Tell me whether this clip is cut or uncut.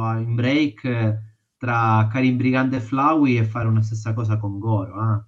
uncut